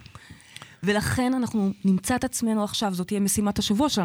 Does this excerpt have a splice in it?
no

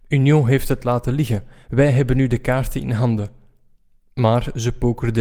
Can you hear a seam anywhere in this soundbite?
no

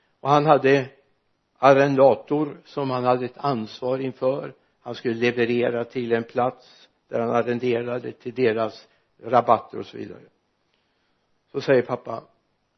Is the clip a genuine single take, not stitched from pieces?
yes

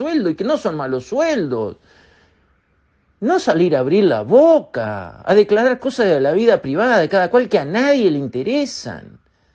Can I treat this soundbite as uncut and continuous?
yes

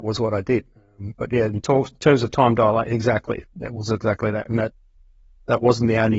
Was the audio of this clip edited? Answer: no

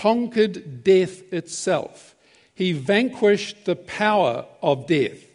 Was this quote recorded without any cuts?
yes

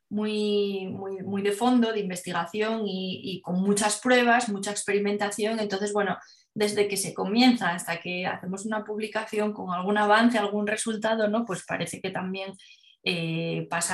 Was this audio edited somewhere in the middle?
no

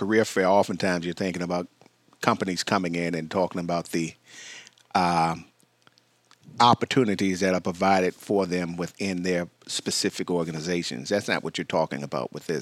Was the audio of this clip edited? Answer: no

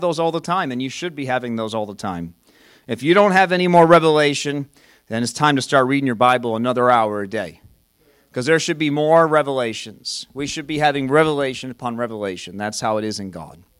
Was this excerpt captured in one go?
yes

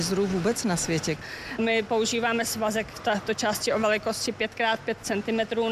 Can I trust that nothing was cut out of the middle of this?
yes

